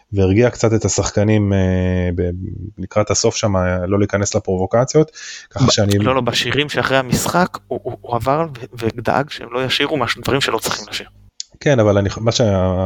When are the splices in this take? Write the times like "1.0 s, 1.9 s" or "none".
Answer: none

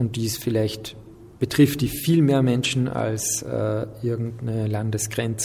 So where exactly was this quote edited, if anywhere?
none

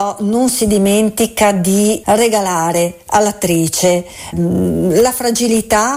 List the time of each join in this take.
2.0 s, 4.3 s

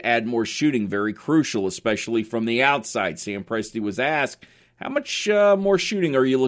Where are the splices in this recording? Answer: none

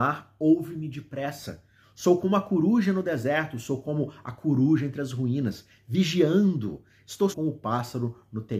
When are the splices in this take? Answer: 7.3 s

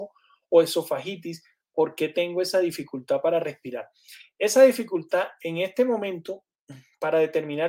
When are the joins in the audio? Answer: none

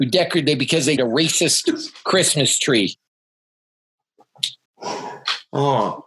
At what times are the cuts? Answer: 1.0 s, 4.7 s

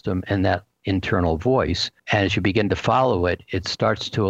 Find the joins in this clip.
2.0 s

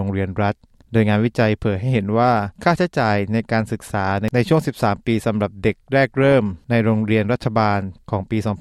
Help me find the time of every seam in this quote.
2.5 s

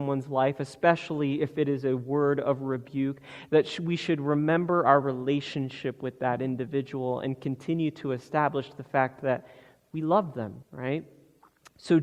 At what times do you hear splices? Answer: 10.6 s

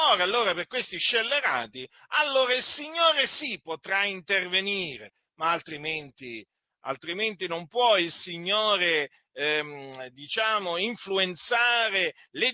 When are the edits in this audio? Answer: none

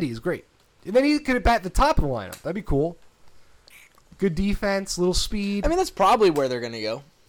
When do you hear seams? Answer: none

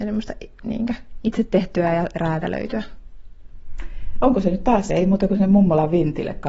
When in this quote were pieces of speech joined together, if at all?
4.9 s

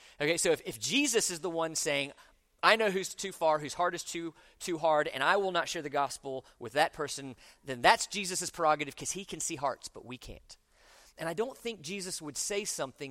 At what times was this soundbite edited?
none

